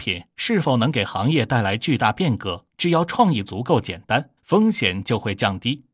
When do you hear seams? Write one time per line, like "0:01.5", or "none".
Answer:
0:02.7
0:04.4